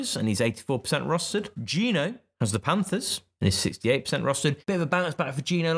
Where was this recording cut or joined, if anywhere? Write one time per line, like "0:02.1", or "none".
0:01.5
0:04.6